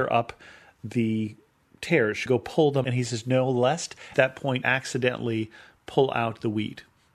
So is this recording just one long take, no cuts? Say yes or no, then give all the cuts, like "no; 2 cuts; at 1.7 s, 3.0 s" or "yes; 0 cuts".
no; 4 cuts; at 2.3 s, 2.8 s, 4.1 s, 4.6 s